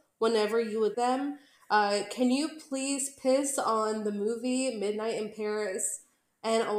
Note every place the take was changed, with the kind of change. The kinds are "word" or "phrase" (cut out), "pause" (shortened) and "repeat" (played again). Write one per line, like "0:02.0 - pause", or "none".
0:00.9 - word